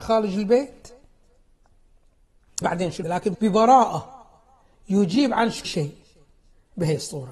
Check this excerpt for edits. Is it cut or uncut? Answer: cut